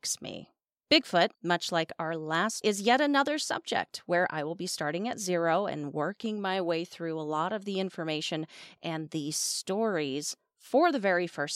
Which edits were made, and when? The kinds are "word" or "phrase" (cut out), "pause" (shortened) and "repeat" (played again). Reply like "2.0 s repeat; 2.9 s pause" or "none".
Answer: 1.3 s pause; 2.6 s phrase